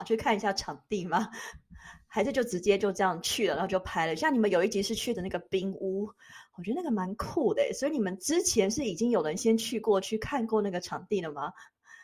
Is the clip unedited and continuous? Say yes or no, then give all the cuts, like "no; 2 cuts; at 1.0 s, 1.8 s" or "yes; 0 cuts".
no; 1 cut; at 5.1 s